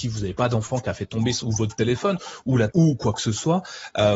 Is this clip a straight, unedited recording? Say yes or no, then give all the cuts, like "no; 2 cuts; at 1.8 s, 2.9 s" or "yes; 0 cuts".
no; 2 cuts; at 1.4 s, 2.7 s